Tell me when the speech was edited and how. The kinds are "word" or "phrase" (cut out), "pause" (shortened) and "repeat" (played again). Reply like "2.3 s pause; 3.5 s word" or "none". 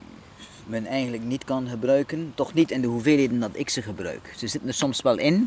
none